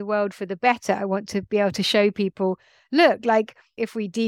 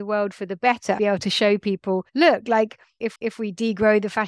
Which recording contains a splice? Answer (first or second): second